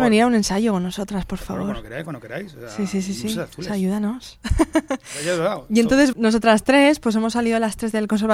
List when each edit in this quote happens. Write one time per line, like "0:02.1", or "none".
0:06.1

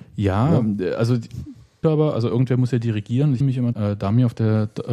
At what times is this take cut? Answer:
0:01.8
0:03.4
0:03.7

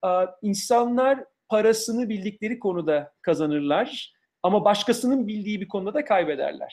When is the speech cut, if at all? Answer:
none

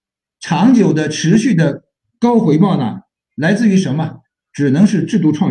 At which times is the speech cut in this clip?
none

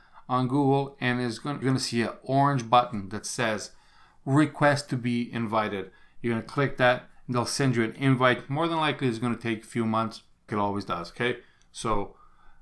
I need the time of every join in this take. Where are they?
0:01.6
0:10.5

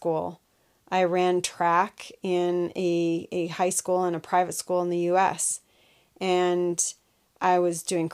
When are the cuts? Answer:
none

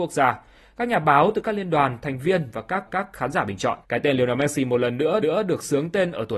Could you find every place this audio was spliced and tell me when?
0:02.9
0:03.8
0:05.2

